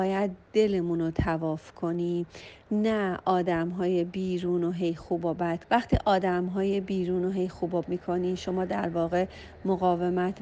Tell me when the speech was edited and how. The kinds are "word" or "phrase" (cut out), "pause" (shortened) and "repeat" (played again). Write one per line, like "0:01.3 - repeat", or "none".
0:05.6 - word
0:07.8 - word